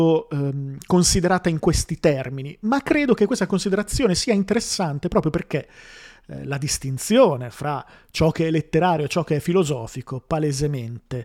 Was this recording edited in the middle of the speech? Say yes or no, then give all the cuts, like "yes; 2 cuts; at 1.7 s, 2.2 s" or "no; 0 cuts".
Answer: no; 0 cuts